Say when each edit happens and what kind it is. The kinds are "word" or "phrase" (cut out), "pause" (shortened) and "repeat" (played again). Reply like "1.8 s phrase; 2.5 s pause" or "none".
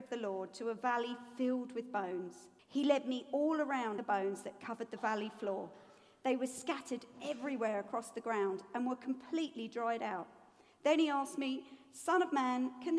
2.6 s pause; 4.0 s word